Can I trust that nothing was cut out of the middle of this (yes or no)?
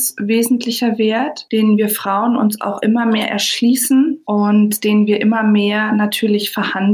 yes